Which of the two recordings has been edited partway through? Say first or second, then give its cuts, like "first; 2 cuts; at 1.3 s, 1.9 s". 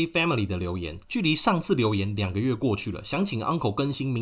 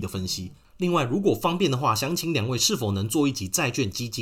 first; 1 cut; at 1.0 s